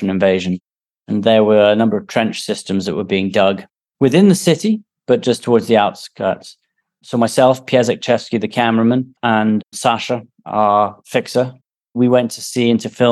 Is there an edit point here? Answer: no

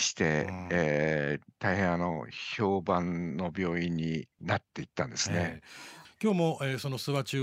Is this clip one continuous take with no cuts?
no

